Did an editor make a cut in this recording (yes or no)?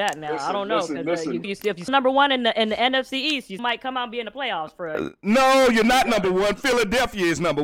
yes